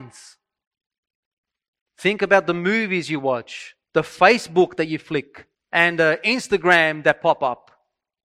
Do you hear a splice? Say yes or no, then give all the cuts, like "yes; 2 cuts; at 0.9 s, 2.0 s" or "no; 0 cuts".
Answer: yes; 2 cuts; at 3.8 s, 5.5 s